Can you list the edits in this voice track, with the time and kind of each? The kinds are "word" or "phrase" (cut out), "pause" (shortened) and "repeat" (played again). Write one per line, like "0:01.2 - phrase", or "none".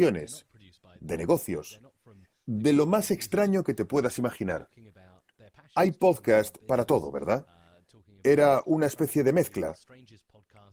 none